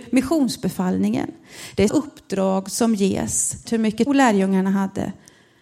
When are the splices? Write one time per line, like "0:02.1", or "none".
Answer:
0:01.9
0:03.7
0:04.1

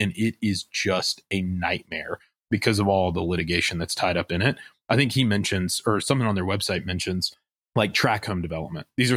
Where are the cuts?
0:07.6

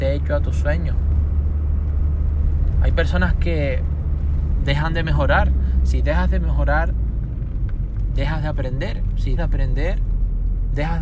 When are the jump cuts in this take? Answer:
0:09.4

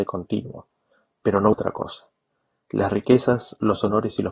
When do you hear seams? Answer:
0:01.5

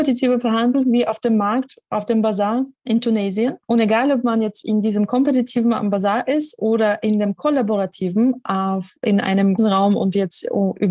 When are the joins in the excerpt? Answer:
0:02.8
0:03.6
0:04.6
0:09.6

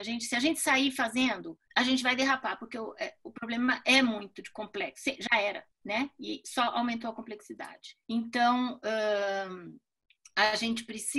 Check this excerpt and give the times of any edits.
0:01.7
0:08.0

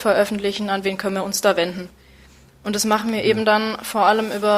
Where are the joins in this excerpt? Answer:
none

